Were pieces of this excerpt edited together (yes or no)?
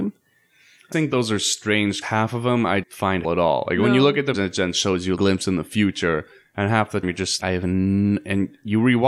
yes